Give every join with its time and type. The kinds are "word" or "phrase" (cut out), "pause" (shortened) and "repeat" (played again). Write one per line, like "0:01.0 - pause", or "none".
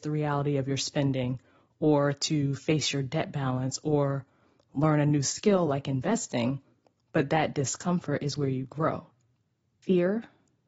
none